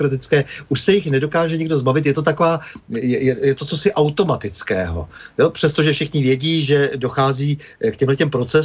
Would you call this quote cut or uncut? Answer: uncut